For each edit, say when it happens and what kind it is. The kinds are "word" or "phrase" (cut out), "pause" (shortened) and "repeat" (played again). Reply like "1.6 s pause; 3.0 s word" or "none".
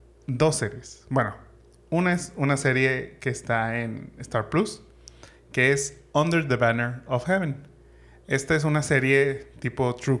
none